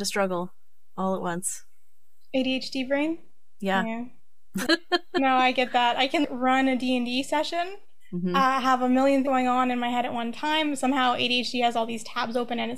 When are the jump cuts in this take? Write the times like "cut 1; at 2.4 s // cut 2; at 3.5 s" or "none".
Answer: cut 1; at 9.2 s